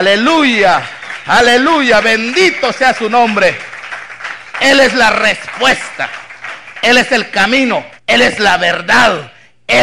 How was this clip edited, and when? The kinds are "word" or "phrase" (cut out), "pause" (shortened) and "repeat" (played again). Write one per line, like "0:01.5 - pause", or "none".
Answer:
0:08.0 - pause